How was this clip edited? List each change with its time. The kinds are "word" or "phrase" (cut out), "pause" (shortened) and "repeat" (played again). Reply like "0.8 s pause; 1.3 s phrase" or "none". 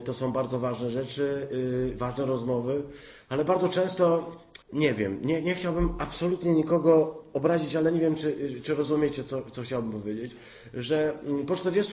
4.6 s pause